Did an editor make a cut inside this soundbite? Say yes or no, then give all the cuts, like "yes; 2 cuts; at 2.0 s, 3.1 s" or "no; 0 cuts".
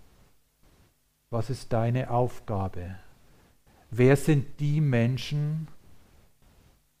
no; 0 cuts